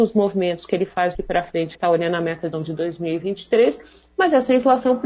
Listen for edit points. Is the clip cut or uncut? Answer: cut